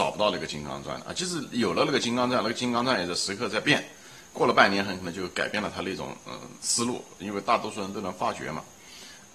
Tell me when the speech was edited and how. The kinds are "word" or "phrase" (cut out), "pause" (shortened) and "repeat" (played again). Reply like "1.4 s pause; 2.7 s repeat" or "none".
4.3 s word